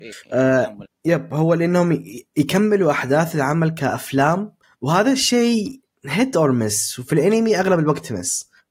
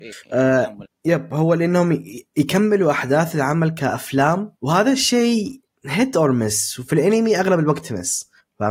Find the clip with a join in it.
second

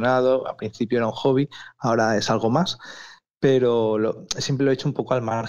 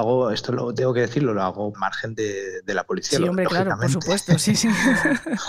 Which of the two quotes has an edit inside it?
second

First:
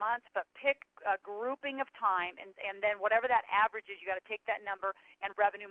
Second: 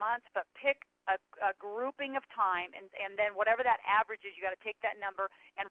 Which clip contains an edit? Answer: first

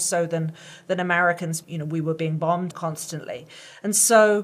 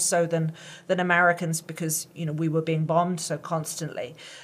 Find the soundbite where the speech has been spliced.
first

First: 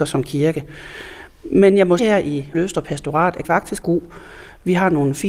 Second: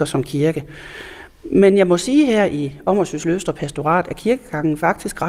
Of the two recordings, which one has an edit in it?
first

